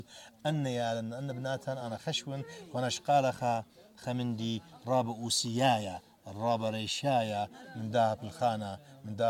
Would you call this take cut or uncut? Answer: uncut